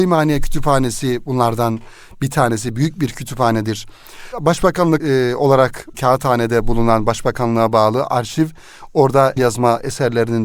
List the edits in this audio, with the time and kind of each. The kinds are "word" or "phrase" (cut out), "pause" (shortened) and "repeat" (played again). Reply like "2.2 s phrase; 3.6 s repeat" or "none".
5.0 s word; 5.9 s word; 9.4 s word